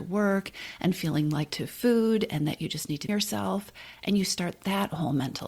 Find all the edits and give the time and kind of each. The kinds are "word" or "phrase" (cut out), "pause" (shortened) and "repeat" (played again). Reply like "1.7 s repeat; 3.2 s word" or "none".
1.5 s phrase; 3.1 s phrase